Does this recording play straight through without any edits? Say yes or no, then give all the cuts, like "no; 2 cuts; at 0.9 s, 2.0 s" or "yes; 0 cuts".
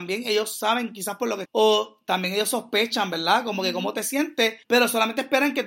no; 2 cuts; at 1.5 s, 4.6 s